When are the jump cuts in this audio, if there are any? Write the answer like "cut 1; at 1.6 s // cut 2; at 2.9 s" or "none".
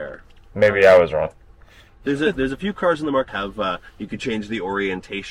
cut 1; at 3.3 s

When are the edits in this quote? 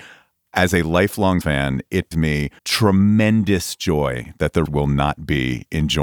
cut 1; at 1.4 s // cut 2; at 2.1 s // cut 3; at 2.6 s // cut 4; at 4.7 s

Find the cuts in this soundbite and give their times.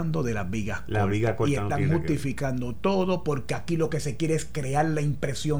none

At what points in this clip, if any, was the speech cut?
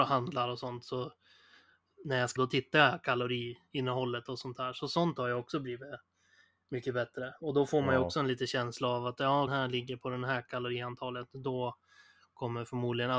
cut 1; at 2.4 s // cut 2; at 9.5 s

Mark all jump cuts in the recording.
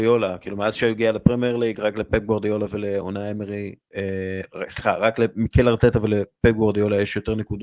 none

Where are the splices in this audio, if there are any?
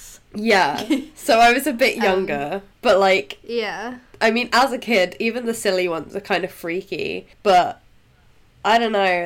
cut 1; at 2.7 s // cut 2; at 7.3 s

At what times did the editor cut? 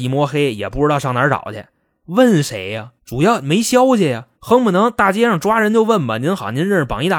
cut 1; at 3.0 s // cut 2; at 4.3 s

